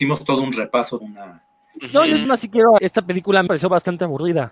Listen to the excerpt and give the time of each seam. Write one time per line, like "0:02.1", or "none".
0:01.0
0:02.2
0:02.8
0:03.5